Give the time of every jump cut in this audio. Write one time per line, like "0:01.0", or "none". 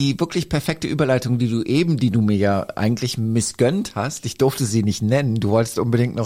none